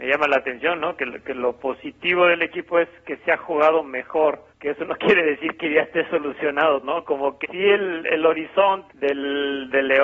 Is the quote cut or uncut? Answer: cut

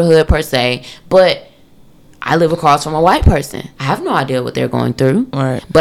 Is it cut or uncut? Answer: cut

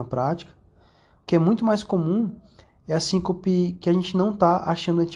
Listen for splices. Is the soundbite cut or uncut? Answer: uncut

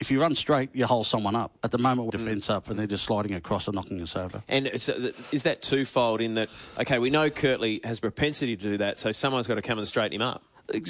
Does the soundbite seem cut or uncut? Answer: cut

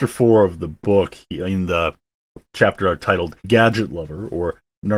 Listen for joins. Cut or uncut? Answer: cut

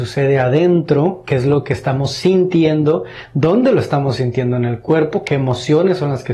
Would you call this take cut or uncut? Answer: uncut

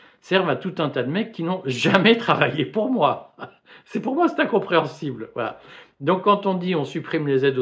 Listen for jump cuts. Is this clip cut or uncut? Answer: uncut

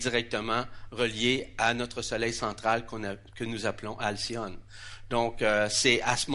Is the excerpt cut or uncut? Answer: uncut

